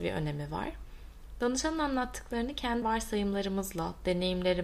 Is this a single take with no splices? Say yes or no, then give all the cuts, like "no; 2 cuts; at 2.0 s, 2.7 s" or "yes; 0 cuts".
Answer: no; 1 cut; at 2.8 s